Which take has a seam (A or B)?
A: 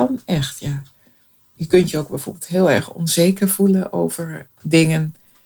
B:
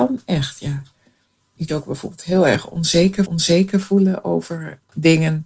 B